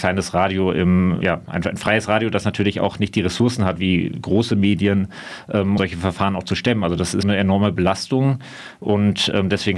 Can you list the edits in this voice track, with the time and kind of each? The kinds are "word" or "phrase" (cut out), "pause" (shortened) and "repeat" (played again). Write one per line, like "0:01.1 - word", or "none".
0:01.2 - word
0:05.8 - word
0:07.2 - word